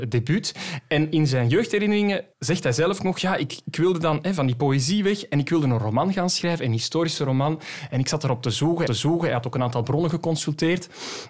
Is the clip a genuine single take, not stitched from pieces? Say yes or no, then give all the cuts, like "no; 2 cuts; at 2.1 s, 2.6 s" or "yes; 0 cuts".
no; 2 cuts; at 2.3 s, 8.9 s